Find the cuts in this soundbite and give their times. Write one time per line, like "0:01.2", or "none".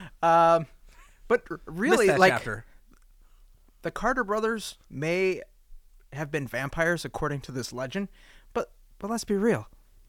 0:04.8